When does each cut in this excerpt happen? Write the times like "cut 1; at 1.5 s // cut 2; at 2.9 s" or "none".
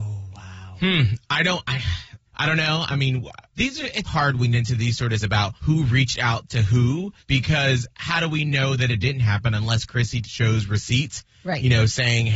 cut 1; at 2.3 s // cut 2; at 3.5 s // cut 3; at 4.1 s // cut 4; at 4.5 s // cut 5; at 5.2 s // cut 6; at 5.6 s // cut 7; at 7.2 s // cut 8; at 10.2 s